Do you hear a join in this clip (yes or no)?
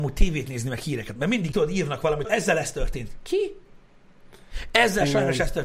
yes